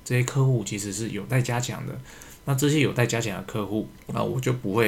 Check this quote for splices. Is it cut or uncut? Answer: cut